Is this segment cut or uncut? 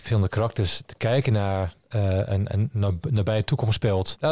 uncut